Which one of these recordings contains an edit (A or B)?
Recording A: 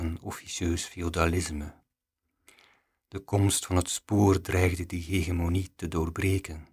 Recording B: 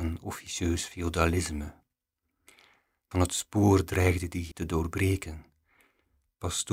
B